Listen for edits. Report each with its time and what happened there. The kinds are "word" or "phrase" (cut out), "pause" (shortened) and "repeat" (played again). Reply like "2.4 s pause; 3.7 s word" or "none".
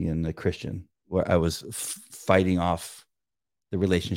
1.0 s pause